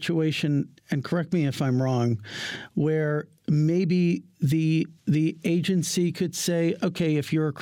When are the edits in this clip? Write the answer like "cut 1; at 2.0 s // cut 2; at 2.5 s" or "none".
cut 1; at 5.0 s

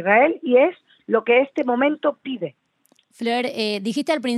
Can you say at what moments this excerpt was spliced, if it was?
none

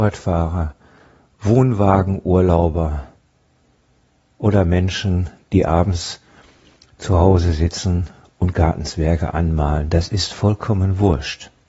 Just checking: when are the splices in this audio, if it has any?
none

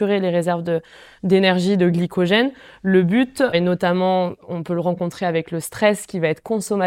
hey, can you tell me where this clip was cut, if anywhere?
none

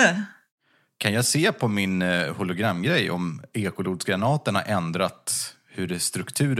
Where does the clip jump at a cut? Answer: none

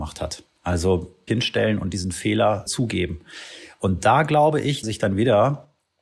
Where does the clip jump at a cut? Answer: cut 1; at 1.3 s // cut 2; at 2.7 s // cut 3; at 4.8 s

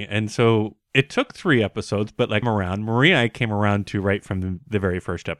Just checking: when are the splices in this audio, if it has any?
cut 1; at 2.4 s

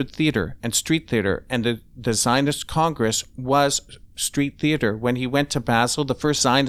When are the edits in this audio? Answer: none

